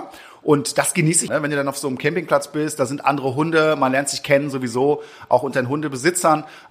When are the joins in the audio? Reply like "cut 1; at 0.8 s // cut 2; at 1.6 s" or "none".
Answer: cut 1; at 1.3 s